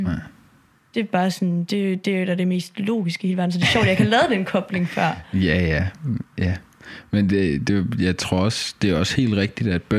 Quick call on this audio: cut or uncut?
uncut